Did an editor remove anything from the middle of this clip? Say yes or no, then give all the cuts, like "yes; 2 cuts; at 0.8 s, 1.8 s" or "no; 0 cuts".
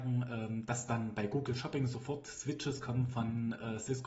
no; 0 cuts